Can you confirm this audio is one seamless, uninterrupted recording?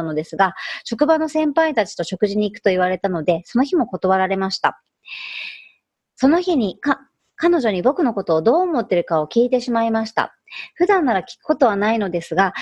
yes; 0 cuts

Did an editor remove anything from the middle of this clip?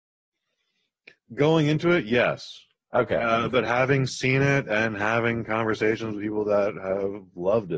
no; 0 cuts

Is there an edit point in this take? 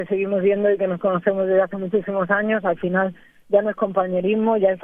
no; 0 cuts

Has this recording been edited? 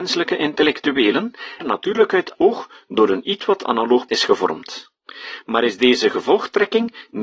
yes; 3 cuts; at 1.6 s, 2.3 s, 4.1 s

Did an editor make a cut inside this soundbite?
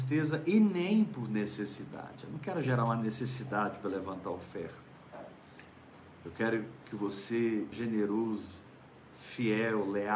yes; 1 cut; at 7.7 s

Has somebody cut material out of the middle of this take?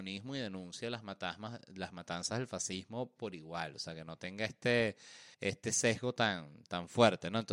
yes; 1 cut; at 5.3 s

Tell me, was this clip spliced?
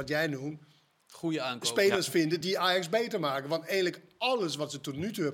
no; 0 cuts

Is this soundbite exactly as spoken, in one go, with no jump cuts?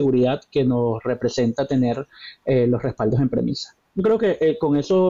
yes; 0 cuts

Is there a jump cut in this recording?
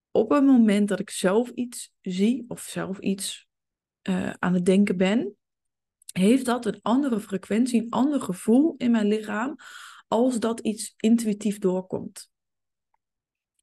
no; 0 cuts

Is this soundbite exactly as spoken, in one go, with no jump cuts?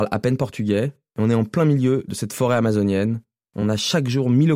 yes; 0 cuts

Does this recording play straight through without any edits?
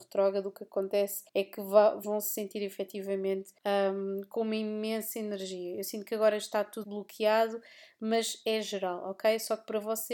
no; 4 cuts; at 1.3 s, 2.0 s, 3.6 s, 6.8 s

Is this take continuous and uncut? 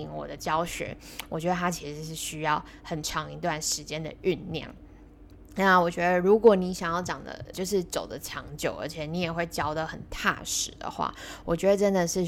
no; 1 cut; at 7.5 s

